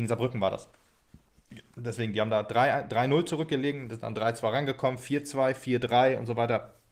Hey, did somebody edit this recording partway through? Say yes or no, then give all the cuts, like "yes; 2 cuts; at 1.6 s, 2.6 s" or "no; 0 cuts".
no; 0 cuts